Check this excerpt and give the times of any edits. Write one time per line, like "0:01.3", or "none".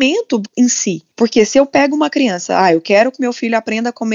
0:01.1

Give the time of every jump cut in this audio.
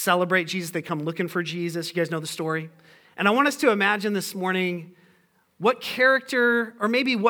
none

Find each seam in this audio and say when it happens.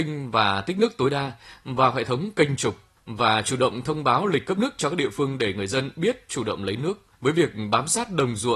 0:03.0
0:07.1

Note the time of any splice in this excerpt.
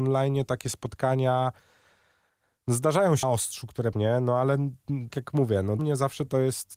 0:03.2
0:03.9
0:05.1
0:05.8

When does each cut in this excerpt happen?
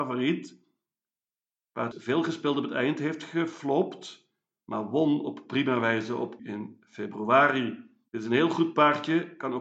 0:01.9
0:06.4

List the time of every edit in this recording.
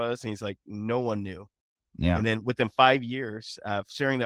none

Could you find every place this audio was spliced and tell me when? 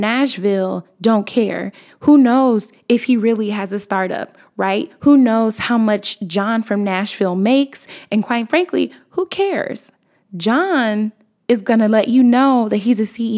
none

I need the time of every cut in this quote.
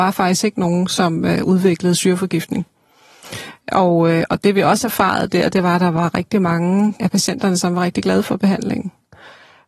0:07.0

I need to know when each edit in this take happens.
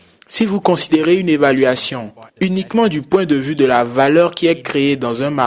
0:02.3

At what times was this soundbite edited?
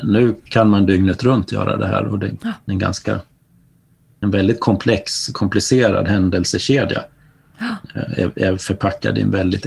none

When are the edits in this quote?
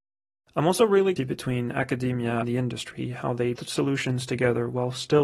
0:01.2
0:02.4
0:03.5

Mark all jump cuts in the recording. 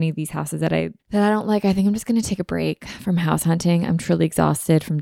0:01.0

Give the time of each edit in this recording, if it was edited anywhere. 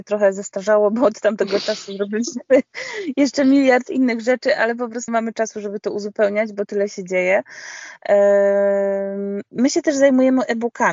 0:05.1

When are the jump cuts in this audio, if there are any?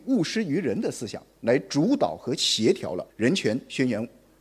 0:03.1

